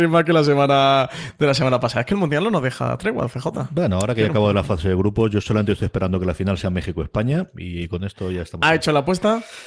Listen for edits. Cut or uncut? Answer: uncut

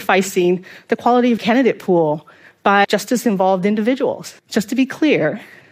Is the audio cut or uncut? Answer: cut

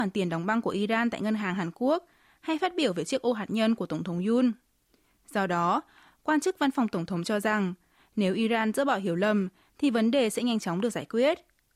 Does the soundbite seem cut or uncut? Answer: uncut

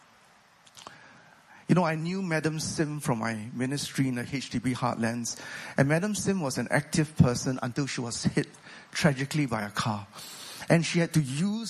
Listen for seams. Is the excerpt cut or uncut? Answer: uncut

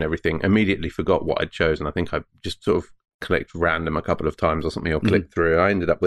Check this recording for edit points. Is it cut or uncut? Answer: uncut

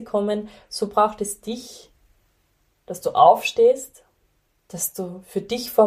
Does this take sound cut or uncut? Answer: cut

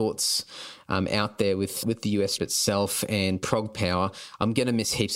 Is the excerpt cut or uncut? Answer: cut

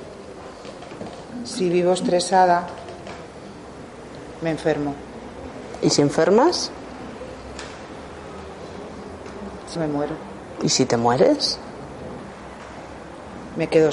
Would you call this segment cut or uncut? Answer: cut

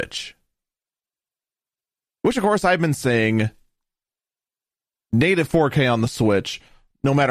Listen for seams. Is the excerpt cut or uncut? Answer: uncut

